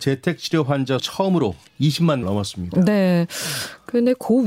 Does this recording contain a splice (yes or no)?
yes